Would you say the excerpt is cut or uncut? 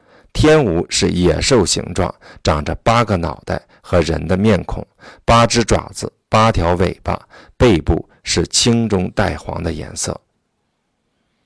uncut